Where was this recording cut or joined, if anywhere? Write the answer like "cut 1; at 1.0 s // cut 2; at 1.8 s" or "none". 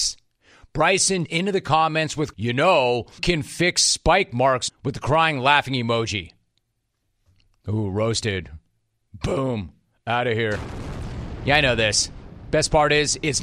cut 1; at 1.3 s // cut 2; at 2.3 s // cut 3; at 3.2 s // cut 4; at 4.7 s